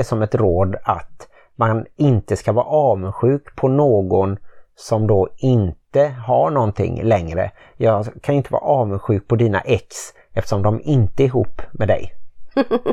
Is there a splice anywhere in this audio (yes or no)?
no